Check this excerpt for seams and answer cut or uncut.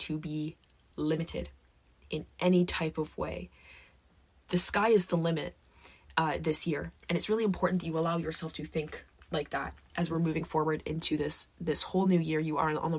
uncut